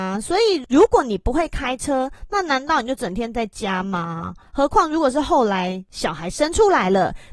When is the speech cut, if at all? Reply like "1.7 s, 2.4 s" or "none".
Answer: none